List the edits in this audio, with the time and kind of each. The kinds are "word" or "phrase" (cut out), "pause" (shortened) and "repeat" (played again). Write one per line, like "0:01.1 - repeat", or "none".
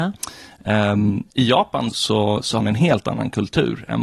0:01.3 - pause
0:01.9 - word
0:02.6 - word